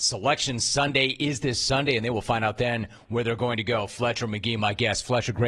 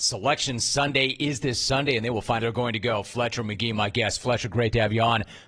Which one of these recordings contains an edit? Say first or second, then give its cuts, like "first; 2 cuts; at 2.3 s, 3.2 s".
second; 1 cut; at 2.4 s